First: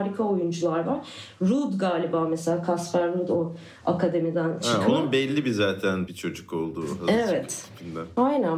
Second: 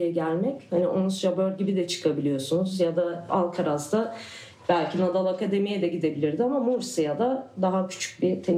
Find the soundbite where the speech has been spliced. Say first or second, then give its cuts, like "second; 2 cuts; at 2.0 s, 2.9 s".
first; 1 cut; at 6.1 s